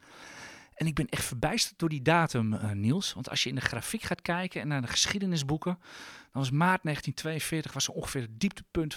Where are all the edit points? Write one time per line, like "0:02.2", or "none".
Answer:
none